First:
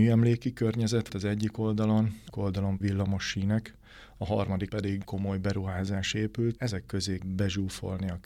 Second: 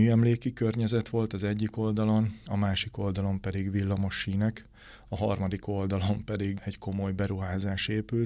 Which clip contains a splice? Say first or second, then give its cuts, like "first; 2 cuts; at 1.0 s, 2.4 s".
first; 7 cuts; at 1.1 s, 2.3 s, 2.8 s, 4.7 s, 5.0 s, 6.6 s, 7.2 s